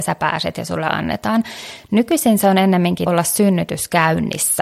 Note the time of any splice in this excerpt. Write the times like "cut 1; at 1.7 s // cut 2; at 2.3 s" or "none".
cut 1; at 3.1 s